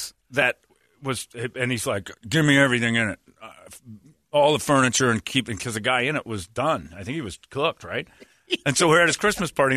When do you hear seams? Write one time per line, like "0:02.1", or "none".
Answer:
none